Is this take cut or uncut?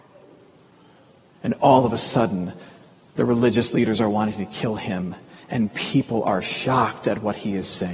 uncut